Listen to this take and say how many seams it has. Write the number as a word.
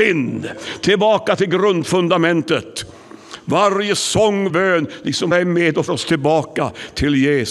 three